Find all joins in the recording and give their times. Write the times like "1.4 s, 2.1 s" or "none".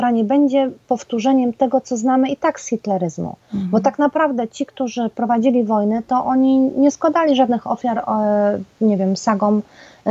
3.4 s